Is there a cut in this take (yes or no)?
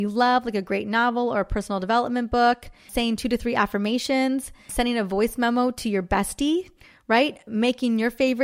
no